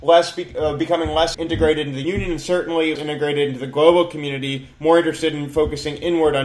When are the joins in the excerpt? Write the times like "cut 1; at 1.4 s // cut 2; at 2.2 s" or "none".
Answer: cut 1; at 1.3 s // cut 2; at 2.0 s // cut 3; at 3.0 s